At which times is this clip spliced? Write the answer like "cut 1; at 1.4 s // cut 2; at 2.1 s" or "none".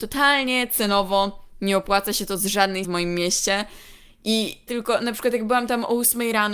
cut 1; at 2.8 s // cut 2; at 4.7 s